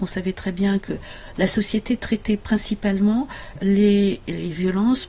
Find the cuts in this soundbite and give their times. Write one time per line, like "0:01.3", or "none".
none